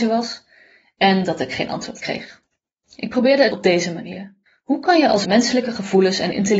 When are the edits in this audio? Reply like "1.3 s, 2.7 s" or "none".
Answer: 2.7 s, 3.5 s, 4.5 s, 5.2 s